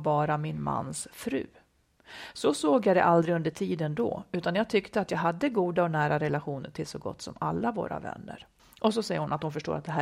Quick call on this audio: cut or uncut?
cut